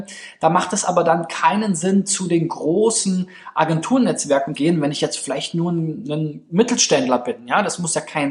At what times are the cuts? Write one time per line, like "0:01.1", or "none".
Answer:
0:04.5